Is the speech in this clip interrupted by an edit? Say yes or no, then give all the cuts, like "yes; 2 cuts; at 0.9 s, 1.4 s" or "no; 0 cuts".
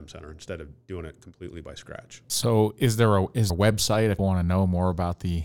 yes; 2 cuts; at 3.5 s, 4.2 s